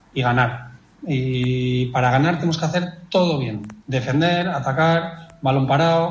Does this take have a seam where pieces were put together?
yes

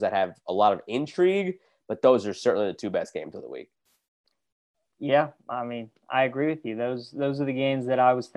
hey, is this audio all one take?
yes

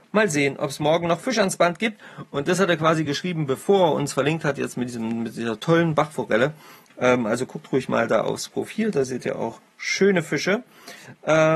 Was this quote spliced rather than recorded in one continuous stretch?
no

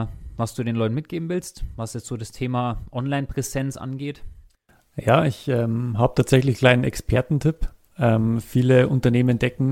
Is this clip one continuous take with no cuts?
yes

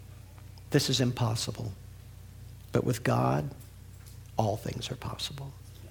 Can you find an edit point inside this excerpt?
no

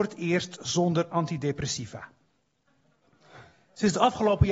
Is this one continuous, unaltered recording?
yes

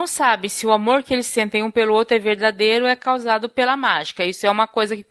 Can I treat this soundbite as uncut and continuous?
yes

